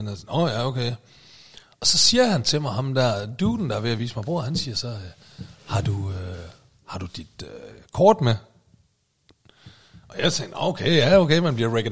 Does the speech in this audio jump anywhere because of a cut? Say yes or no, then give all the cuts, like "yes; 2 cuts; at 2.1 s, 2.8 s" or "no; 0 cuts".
no; 0 cuts